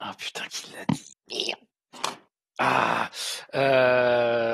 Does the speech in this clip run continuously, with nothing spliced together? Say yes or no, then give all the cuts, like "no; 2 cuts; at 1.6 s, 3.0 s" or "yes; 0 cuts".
no; 1 cut; at 1.2 s